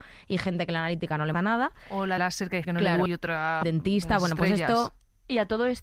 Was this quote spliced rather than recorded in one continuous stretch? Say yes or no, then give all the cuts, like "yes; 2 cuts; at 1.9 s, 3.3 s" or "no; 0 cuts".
yes; 5 cuts; at 1.3 s, 2.2 s, 2.6 s, 3.1 s, 3.6 s